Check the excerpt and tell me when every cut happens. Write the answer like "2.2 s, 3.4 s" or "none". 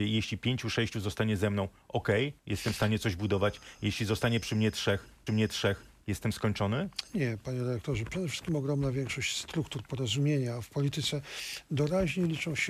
2.4 s, 5.3 s